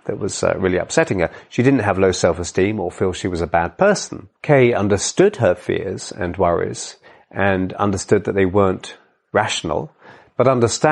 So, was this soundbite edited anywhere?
no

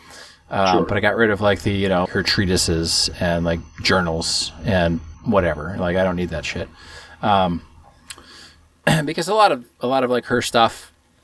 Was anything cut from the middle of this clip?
yes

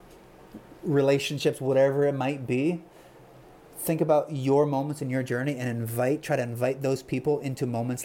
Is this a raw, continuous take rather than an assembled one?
yes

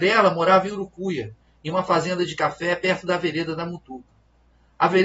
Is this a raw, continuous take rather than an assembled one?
yes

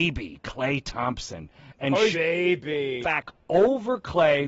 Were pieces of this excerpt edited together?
yes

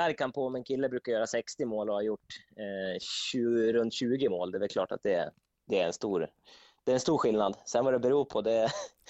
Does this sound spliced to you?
no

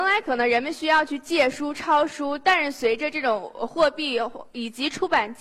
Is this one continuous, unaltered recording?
yes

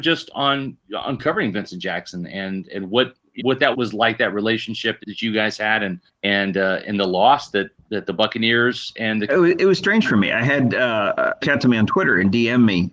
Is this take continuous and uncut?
no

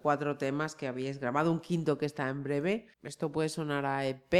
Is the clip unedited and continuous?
no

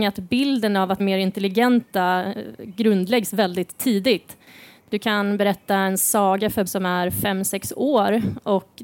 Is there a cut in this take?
yes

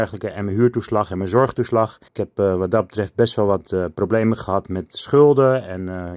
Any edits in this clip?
yes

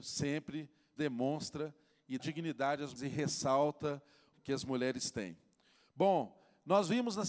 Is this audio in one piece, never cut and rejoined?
no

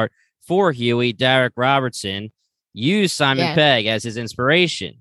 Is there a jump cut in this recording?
no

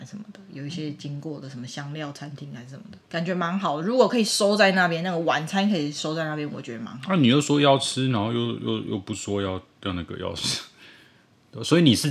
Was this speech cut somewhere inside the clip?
yes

